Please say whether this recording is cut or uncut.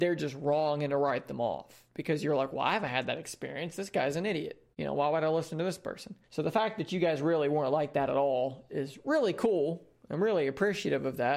cut